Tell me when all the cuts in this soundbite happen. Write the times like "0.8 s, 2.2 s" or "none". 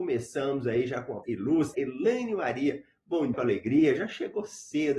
1.2 s, 1.7 s, 3.3 s

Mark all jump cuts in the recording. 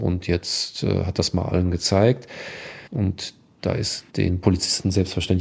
2.9 s, 4.1 s

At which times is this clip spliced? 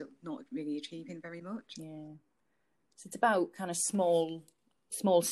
none

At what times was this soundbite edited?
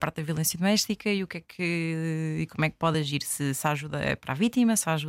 none

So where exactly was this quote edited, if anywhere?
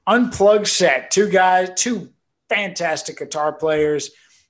none

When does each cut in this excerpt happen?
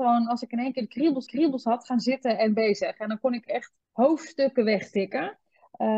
1.3 s, 3.8 s

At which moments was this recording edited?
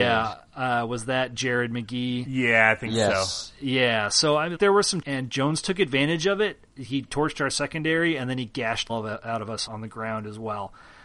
4.6 s, 5.0 s, 7.1 s, 8.9 s, 9.7 s

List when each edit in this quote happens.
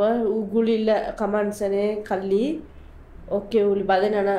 none

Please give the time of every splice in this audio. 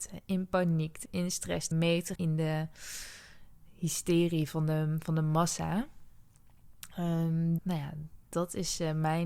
1.1 s, 1.7 s, 2.2 s, 7.6 s

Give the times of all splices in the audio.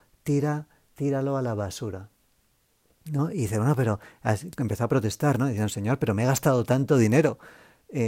none

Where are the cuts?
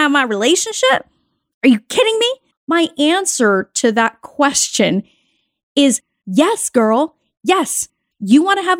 2.5 s

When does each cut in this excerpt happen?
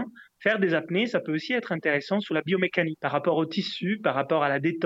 none

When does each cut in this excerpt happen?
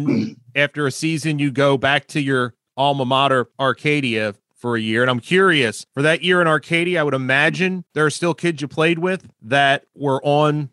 3.5 s, 5.9 s, 7.9 s

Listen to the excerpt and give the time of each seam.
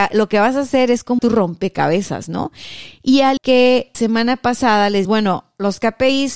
1.2 s, 3.4 s, 3.9 s, 5.0 s

